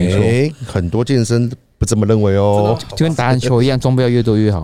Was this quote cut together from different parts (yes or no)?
no